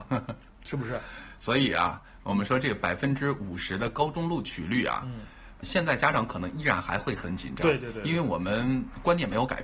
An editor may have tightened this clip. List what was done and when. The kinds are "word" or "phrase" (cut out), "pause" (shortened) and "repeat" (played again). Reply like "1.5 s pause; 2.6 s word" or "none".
5.6 s word

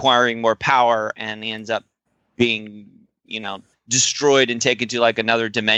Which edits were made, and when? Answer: 2.1 s pause; 3.7 s pause

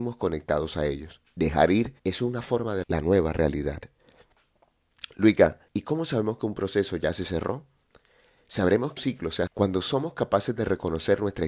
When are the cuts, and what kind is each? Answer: 1.2 s pause; 2.0 s pause; 2.8 s word; 5.7 s pause; 9.0 s word; 9.5 s word

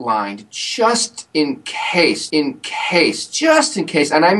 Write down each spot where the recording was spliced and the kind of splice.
2.3 s repeat

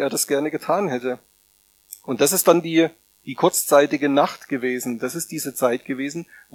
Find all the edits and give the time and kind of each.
none

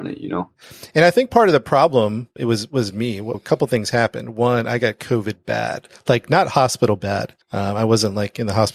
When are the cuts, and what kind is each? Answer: 2.4 s word; 3.3 s word; 7.4 s pause

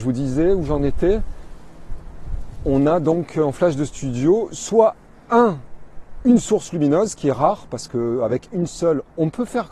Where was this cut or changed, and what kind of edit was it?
none

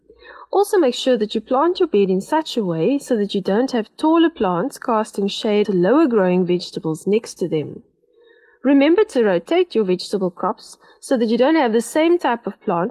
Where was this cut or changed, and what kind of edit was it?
5.6 s word

